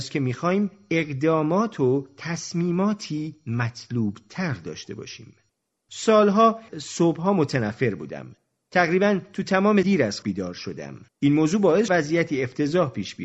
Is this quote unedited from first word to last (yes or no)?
no